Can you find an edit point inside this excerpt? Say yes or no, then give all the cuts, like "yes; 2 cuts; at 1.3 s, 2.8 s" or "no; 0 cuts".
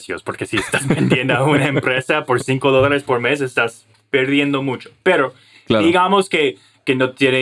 no; 0 cuts